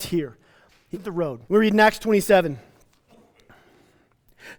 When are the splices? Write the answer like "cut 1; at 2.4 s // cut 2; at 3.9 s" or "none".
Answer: cut 1; at 0.9 s // cut 2; at 1.5 s